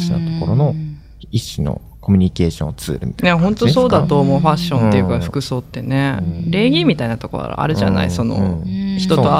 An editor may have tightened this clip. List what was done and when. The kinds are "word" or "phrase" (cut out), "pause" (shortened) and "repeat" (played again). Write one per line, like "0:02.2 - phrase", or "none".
none